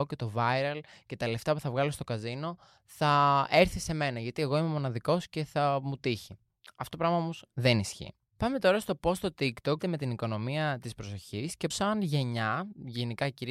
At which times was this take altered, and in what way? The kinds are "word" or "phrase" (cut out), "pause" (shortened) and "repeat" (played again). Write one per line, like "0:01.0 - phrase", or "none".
0:09.8 - word
0:11.7 - word